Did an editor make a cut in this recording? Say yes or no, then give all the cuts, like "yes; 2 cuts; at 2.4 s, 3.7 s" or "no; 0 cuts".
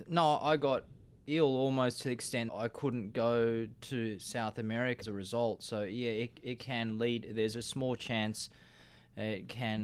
yes; 2 cuts; at 2.5 s, 5.0 s